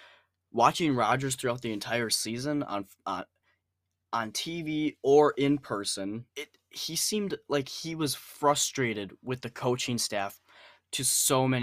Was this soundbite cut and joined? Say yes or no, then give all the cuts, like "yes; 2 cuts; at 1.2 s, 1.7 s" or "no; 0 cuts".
yes; 1 cut; at 6.3 s